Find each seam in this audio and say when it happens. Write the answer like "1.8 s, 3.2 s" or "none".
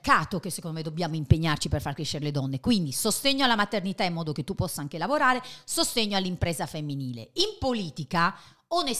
none